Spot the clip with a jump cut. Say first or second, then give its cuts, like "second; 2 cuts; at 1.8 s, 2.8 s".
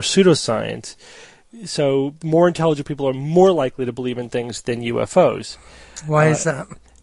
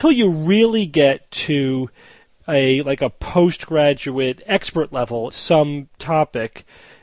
second; 1 cut; at 5.3 s